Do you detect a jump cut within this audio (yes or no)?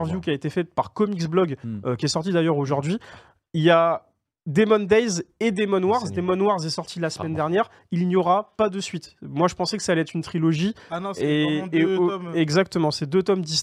no